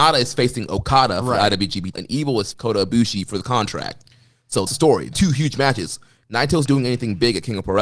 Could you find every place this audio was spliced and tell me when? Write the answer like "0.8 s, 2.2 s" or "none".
1.9 s, 2.5 s, 4.7 s, 5.1 s, 6.7 s